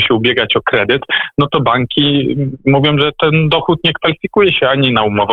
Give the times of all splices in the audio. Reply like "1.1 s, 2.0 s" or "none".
none